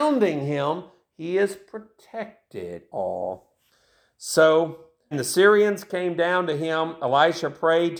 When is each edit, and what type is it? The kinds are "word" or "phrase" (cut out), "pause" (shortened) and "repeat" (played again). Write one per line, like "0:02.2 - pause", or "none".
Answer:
0:02.9 - word
0:05.1 - word